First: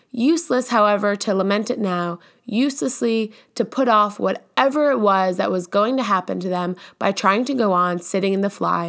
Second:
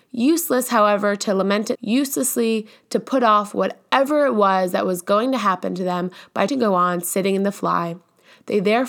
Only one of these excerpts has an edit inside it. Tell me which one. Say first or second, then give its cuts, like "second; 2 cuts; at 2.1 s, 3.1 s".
second; 2 cuts; at 1.8 s, 6.5 s